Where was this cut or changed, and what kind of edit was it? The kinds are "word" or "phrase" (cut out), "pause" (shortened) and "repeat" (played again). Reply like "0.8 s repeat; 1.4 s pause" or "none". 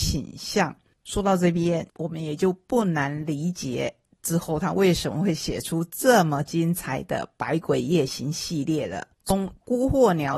1.9 s pause; 9.1 s pause